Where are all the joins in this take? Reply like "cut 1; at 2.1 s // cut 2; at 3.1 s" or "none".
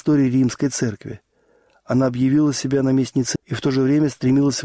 cut 1; at 3.4 s